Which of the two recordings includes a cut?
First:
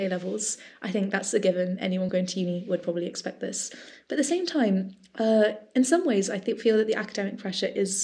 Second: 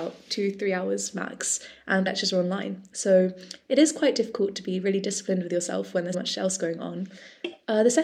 second; 2 cuts; at 2.1 s, 6.1 s

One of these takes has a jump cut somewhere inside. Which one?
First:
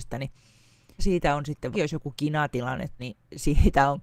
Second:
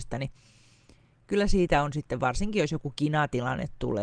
first; 3 cuts; at 1.0 s, 1.7 s, 3.0 s

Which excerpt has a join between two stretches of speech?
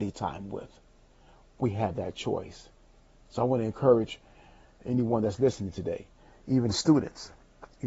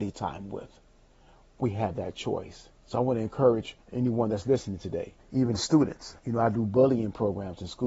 second; 4 cuts; at 2.8 s, 3.8 s, 5.2 s, 6.2 s

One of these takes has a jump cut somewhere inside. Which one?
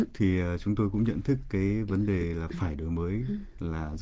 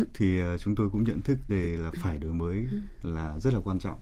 second; 1 cut; at 1.5 s

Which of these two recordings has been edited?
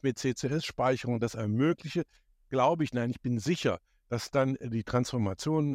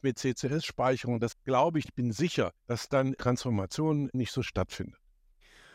second; 6 cuts; at 1.3 s, 1.8 s, 2.6 s, 3.2 s, 4.1 s, 4.5 s

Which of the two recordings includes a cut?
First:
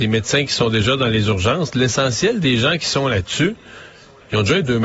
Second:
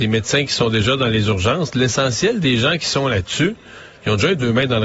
second; 1 cut; at 4.0 s

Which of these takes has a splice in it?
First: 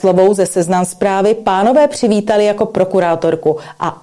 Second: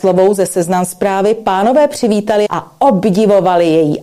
second; 1 cut; at 2.5 s

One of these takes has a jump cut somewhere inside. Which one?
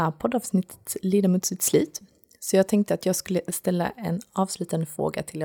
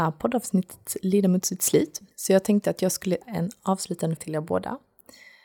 second; 3 cuts; at 2.1 s, 3.2 s, 4.2 s

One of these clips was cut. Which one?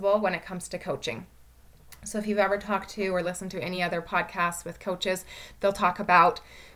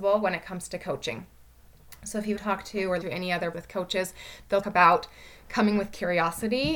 second; 4 cuts; at 2.4 s, 3.0 s, 3.5 s, 4.6 s

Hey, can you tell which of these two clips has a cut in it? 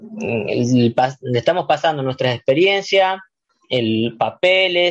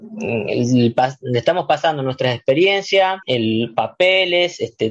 second; 1 cut; at 3.2 s

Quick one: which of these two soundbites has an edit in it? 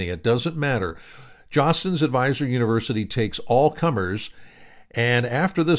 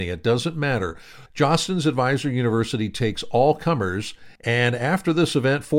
second; 2 cuts; at 1.3 s, 4.4 s

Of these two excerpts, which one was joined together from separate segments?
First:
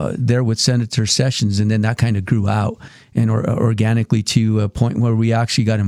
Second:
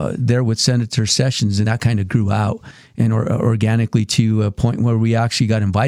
second; 1 cut; at 1.6 s

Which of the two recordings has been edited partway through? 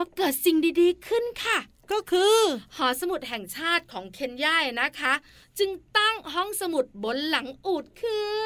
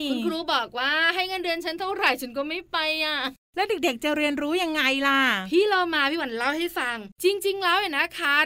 second; 1 cut; at 7.1 s

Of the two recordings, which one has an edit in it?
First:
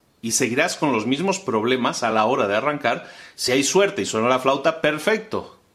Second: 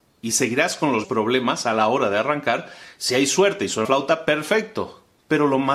second; 2 cuts; at 1.0 s, 3.8 s

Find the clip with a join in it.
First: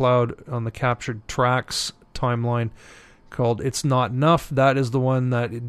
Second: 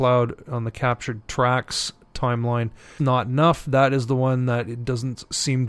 second; 1 cut; at 3.0 s

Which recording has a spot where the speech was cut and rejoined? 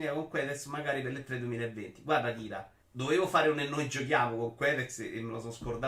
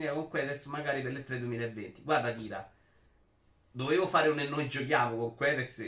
first; 1 cut; at 2.8 s

